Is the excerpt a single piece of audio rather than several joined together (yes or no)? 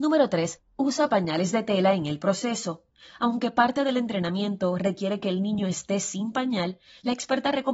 yes